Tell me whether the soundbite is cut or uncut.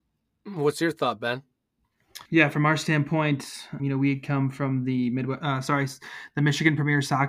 cut